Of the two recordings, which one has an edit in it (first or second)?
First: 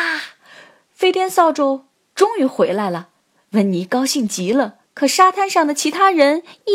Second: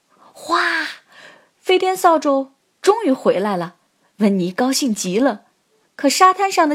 first